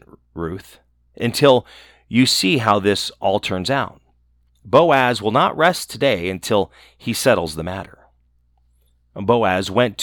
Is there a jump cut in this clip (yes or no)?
no